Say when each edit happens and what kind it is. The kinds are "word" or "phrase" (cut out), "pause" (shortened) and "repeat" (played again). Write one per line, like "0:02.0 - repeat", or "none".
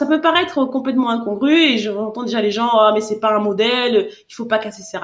none